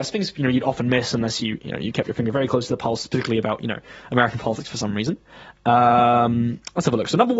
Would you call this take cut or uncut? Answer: uncut